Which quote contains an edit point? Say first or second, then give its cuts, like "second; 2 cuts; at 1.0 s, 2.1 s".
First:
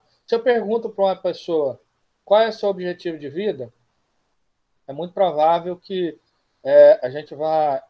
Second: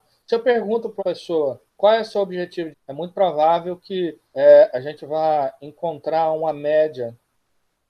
second; 4 cuts; at 1.0 s, 1.7 s, 2.7 s, 4.2 s